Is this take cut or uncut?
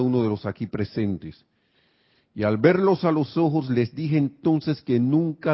uncut